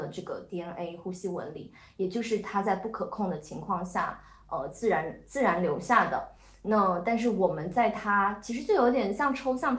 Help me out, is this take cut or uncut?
uncut